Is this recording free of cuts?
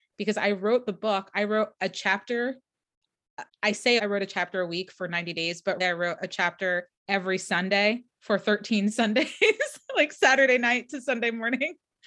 no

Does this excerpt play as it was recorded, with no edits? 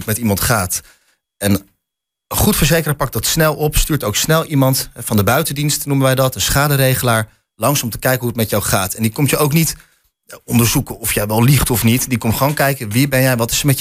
yes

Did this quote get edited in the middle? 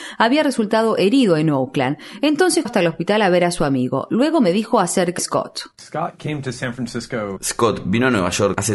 yes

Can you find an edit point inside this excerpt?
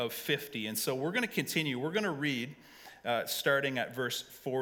no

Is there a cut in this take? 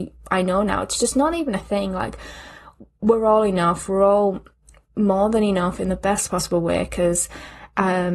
no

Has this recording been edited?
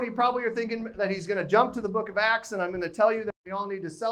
no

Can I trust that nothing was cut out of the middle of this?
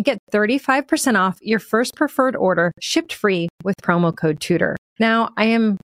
yes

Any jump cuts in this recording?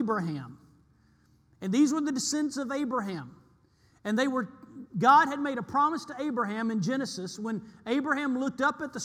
no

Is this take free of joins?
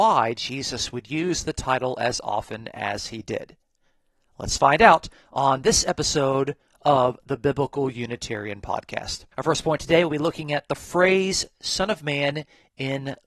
no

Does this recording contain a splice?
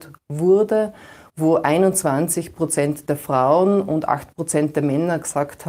no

